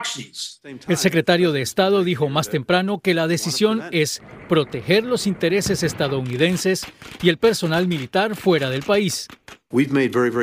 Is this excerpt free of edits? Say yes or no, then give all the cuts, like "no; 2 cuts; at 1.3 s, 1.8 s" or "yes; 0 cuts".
yes; 0 cuts